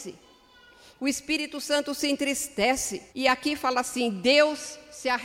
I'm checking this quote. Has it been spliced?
yes; 1 cut; at 3.1 s

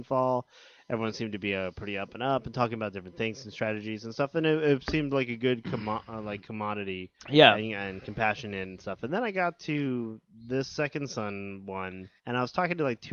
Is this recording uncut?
no; 2 cuts; at 7.2 s, 12.2 s

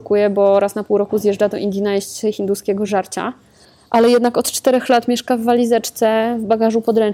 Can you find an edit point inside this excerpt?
no; 0 cuts

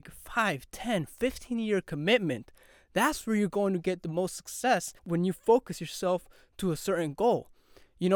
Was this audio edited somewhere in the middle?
yes; 1 cut; at 5.0 s

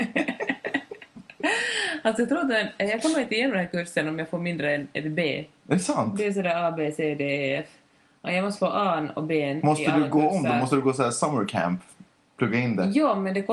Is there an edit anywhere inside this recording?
no; 0 cuts

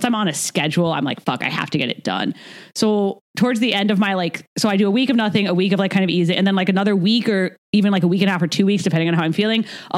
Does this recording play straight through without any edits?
no; 2 cuts; at 3.3 s, 4.5 s

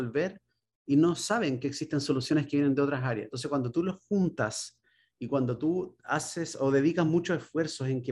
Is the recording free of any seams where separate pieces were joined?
yes; 0 cuts

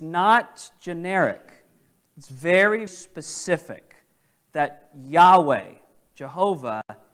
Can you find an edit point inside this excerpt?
yes; 1 cut; at 2.9 s

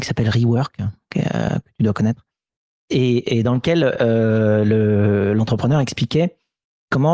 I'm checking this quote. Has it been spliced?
no; 0 cuts

